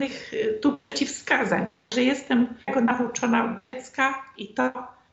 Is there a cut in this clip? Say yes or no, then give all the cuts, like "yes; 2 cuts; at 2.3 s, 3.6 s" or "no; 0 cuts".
yes; 1 cut; at 2.6 s